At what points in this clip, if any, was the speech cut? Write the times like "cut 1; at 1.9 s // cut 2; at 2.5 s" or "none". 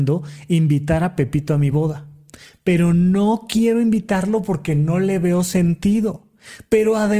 none